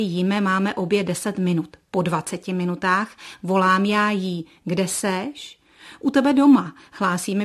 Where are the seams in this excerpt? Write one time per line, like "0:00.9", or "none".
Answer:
none